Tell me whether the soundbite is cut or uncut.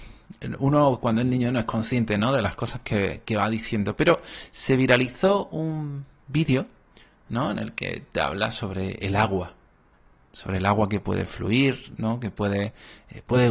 uncut